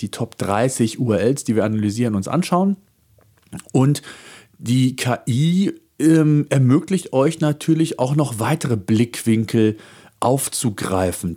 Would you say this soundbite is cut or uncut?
uncut